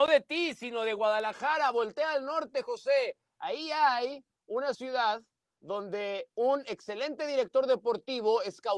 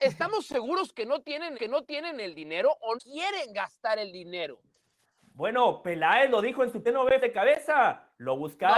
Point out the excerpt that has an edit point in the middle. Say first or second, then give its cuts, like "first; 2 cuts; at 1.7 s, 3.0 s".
second; 4 cuts; at 1.5 s, 3.0 s, 6.8 s, 7.2 s